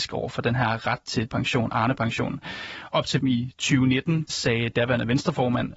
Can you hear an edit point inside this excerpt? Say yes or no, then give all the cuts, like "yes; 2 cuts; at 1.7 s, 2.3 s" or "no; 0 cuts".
yes; 3 cuts; at 1.3 s, 3.2 s, 4.3 s